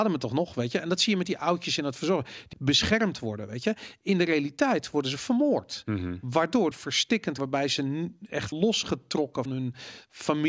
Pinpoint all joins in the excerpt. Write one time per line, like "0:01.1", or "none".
0:02.5
0:06.7
0:07.4
0:08.5
0:09.5